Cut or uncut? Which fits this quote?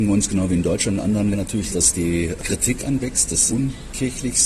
cut